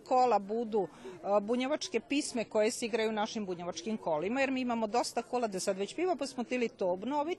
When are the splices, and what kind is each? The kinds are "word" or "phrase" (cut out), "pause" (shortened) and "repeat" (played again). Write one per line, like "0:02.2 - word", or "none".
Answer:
0:05.5 - phrase